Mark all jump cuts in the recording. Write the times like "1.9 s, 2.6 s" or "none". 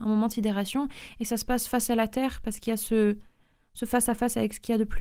none